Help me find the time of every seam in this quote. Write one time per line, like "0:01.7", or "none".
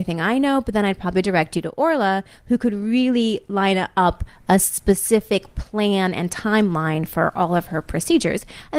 none